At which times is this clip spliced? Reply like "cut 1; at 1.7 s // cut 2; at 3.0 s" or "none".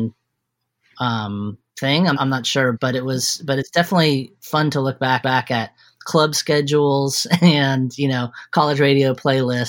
cut 1; at 1.7 s // cut 2; at 2.1 s // cut 3; at 2.7 s // cut 4; at 5.2 s